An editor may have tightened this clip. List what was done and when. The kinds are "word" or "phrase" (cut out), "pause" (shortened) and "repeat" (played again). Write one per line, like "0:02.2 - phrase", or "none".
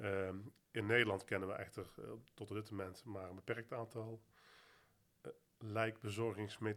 none

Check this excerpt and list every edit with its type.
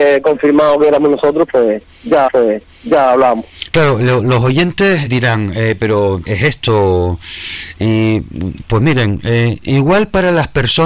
0:02.3 - repeat
0:05.1 - word
0:06.2 - phrase

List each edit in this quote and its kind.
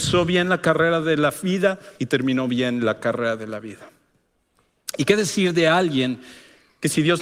0:02.0 - pause

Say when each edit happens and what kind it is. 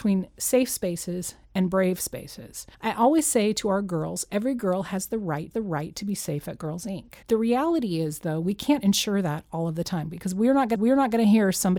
0:02.7 - pause
0:05.5 - repeat
0:07.2 - pause
0:10.7 - repeat

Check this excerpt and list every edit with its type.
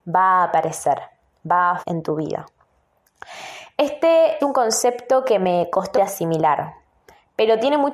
0:01.8 - word
0:04.4 - word
0:05.9 - word

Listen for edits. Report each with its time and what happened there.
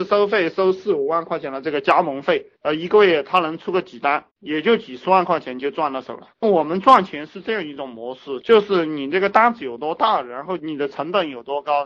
0:02.6 - pause
0:04.3 - pause
0:06.3 - pause

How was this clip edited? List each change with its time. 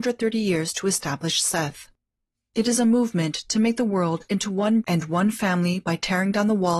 0:02.1 - pause
0:04.8 - word

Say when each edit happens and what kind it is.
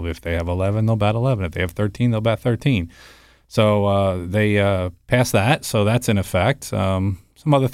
none

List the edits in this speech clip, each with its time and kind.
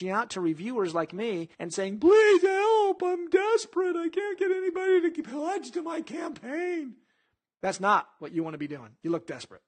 0:01.5 - pause

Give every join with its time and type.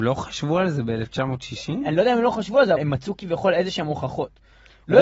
0:02.8 - word

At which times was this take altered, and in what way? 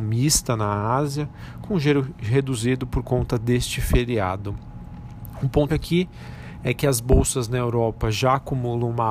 0:05.7 - word

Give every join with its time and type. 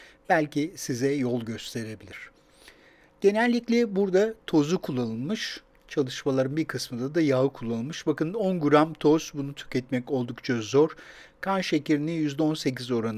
none

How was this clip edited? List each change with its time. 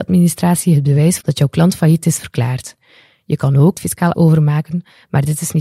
0:01.2 - word
0:03.7 - word
0:04.1 - word

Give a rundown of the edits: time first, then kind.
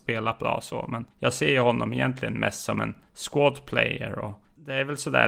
0:01.1 - pause

